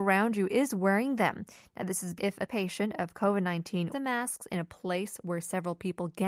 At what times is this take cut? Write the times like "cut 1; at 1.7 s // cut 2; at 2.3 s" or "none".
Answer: cut 1; at 2.2 s // cut 2; at 2.5 s // cut 3; at 3.9 s